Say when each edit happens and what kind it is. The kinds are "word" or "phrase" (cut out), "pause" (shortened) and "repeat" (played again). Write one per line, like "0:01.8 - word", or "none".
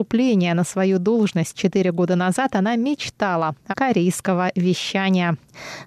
0:03.7 - word